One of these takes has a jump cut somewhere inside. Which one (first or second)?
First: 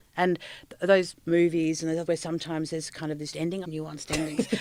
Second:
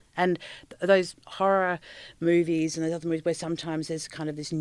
first